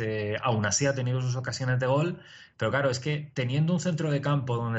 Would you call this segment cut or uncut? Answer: uncut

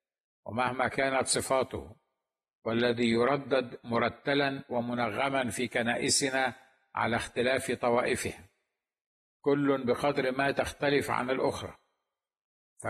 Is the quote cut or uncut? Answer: uncut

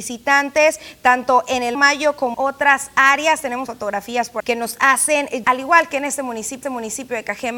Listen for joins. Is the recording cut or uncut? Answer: cut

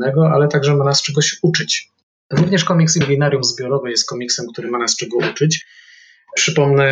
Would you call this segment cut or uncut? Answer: uncut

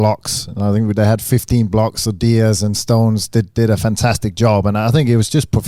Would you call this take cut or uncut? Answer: uncut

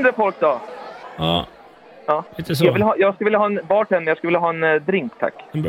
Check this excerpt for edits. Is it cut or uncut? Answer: cut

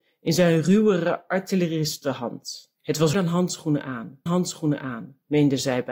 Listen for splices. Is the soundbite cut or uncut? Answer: cut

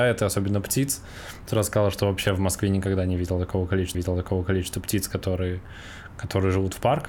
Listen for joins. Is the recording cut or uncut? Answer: cut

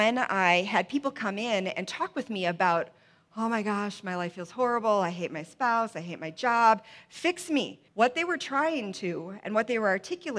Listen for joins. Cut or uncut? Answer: cut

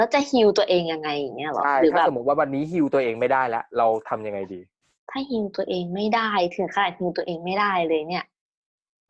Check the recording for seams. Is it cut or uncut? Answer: uncut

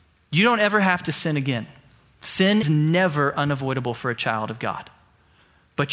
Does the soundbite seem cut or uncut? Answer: cut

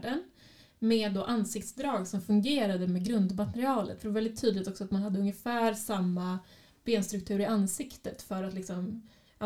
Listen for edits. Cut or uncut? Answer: uncut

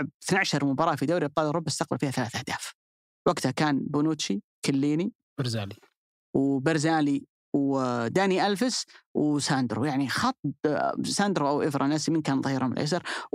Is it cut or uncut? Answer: uncut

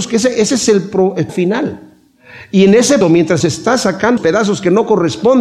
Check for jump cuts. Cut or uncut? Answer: cut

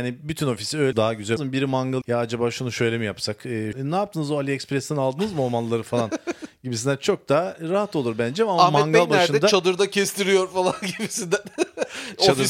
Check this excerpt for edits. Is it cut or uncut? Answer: cut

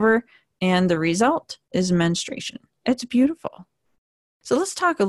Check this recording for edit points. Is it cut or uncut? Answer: cut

